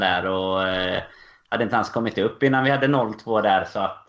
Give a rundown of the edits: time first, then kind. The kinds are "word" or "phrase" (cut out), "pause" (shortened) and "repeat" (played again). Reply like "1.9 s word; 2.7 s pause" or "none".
none

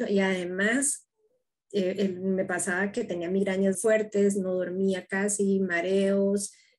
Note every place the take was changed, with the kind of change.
3.7 s word

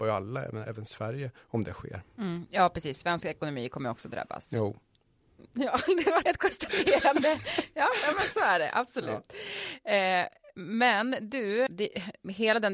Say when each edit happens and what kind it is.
1.4 s pause; 6.4 s word; 11.7 s word

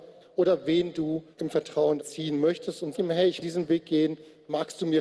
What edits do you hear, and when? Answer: 1.3 s pause; 2.0 s word; 2.9 s word; 3.4 s word

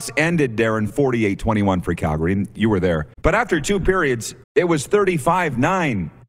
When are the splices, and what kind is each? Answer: 3.1 s pause; 4.4 s pause

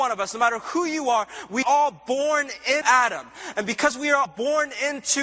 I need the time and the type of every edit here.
1.6 s word; 2.8 s word; 4.3 s word

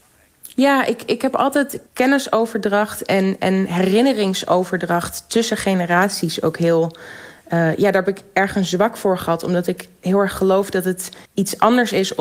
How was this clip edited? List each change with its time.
1.9 s pause; 11.3 s pause

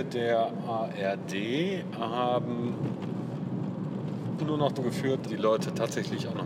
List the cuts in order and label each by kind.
4.4 s word; 4.7 s word; 5.2 s word

